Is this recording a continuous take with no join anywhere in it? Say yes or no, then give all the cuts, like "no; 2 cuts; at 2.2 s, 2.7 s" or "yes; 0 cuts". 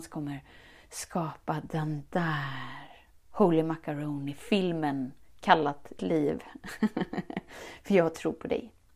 no; 1 cut; at 6.0 s